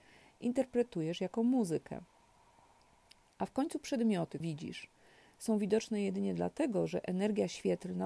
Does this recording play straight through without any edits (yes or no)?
no